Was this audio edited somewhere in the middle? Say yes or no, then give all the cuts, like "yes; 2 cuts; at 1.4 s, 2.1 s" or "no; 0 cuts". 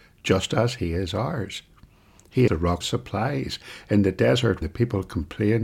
yes; 3 cuts; at 2.5 s, 2.8 s, 4.6 s